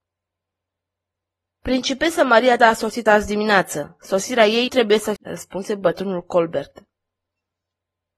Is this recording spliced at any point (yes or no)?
yes